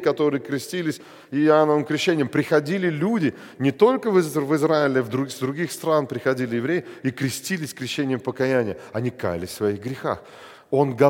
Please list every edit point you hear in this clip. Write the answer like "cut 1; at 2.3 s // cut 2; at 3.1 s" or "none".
none